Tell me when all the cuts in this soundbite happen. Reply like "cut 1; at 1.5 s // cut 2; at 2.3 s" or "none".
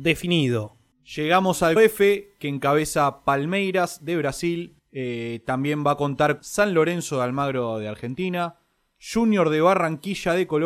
cut 1; at 1.8 s // cut 2; at 4.8 s // cut 3; at 6.4 s